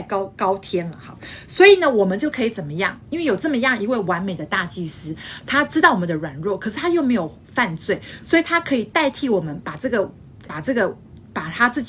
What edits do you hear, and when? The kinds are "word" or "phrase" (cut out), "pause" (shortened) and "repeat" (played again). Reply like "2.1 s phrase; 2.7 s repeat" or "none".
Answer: 10.4 s word